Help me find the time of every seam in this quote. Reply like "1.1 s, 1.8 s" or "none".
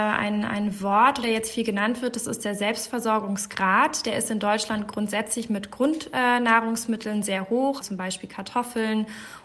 1.2 s, 7.8 s

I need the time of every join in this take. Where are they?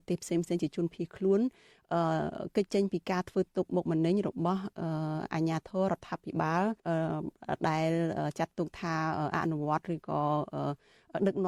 6.8 s

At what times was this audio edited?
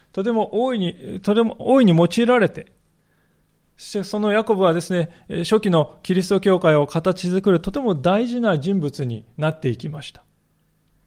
none

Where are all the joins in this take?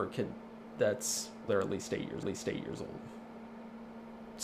1.5 s, 2.2 s

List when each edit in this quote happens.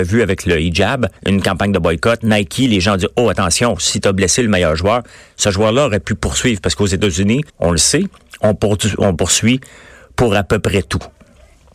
1.2 s, 7.5 s

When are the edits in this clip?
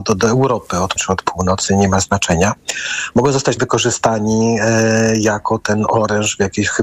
1.0 s, 3.6 s

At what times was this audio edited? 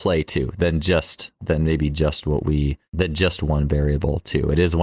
2.8 s

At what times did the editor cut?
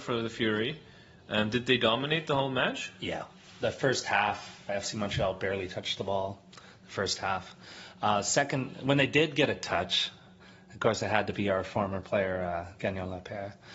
4.7 s

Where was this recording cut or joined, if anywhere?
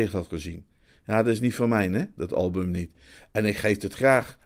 none

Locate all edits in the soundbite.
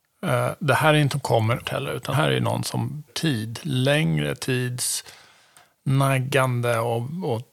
1.1 s, 1.6 s, 2.1 s, 3.1 s

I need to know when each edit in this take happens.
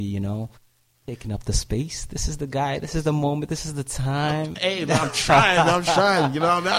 none

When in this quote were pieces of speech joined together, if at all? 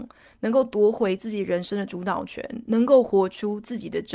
none

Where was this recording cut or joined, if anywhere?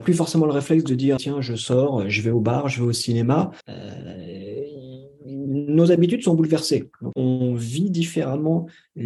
1.2 s, 3.6 s, 7.1 s

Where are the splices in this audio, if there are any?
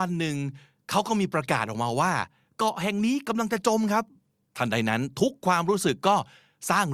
none

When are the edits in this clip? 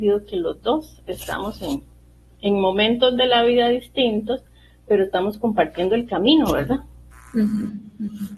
none

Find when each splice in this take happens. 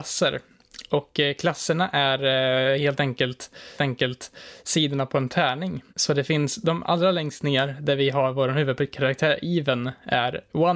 3.8 s, 5.9 s

